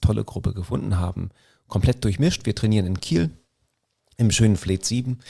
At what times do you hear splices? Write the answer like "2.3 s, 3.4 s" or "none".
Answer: none